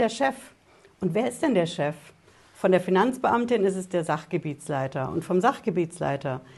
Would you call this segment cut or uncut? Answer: uncut